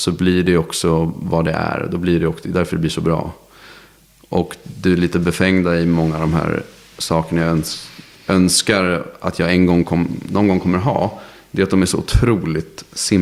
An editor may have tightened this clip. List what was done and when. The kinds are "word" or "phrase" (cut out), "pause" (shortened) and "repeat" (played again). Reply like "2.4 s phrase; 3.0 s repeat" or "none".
none

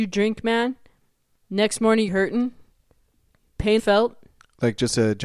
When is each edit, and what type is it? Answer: 2.1 s phrase; 3.8 s phrase

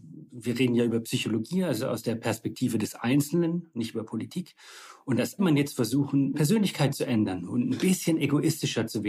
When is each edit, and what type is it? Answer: 5.4 s phrase; 6.3 s word

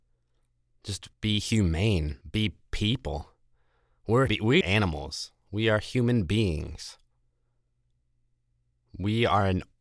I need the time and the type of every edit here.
1.1 s pause; 2.2 s pause; 4.3 s word; 4.6 s word

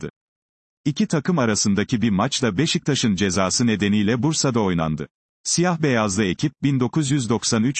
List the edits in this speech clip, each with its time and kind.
none

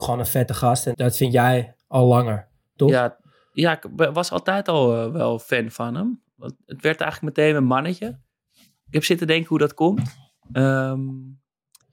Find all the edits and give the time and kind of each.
0.9 s word

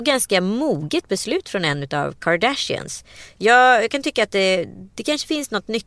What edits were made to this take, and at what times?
none

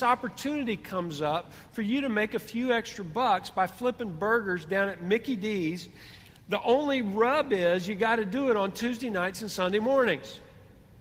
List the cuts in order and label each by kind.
none

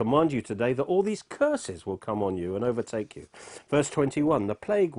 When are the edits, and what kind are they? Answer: none

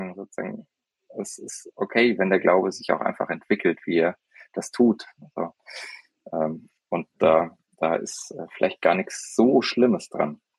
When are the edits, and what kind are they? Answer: none

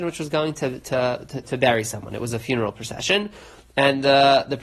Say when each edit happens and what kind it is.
1.4 s word

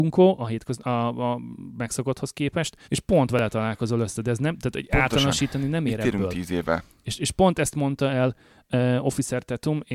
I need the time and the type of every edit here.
2.8 s pause

